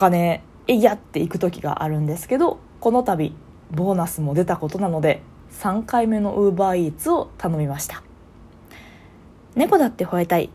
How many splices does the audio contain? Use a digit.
0